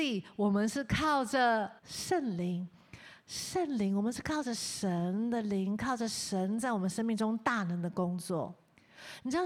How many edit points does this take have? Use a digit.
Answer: 1